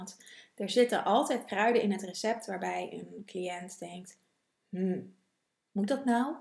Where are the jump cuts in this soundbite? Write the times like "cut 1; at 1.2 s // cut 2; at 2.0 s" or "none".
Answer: none